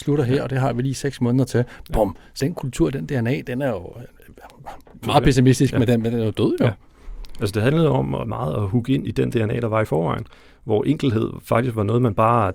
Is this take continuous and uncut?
no; 3 cuts; at 2.4 s, 5.0 s, 9.1 s

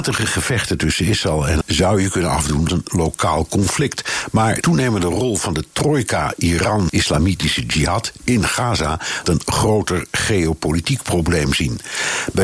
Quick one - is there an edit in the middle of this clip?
yes; 5 cuts; at 1.6 s, 2.7 s, 4.6 s, 6.9 s, 9.2 s

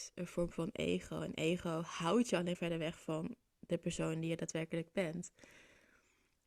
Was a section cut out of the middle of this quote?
yes; 1 cut; at 2.5 s

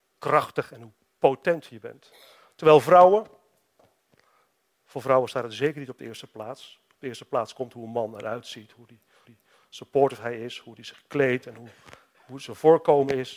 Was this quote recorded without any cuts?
no; 1 cut; at 9.2 s

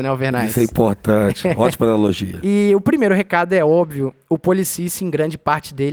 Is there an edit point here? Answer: no; 0 cuts

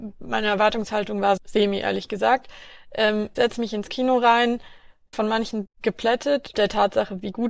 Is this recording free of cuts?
no; 5 cuts; at 1.4 s, 3.3 s, 5.1 s, 5.6 s, 6.5 s

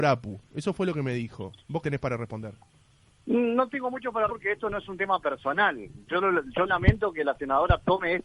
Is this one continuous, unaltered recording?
no; 2 cuts; at 1.8 s, 4.3 s

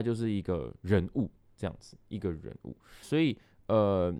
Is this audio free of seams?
no; 1 cut; at 3.0 s

